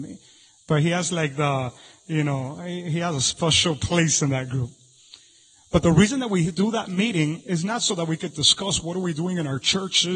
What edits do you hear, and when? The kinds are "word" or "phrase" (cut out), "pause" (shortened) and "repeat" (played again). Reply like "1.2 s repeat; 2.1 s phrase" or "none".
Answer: none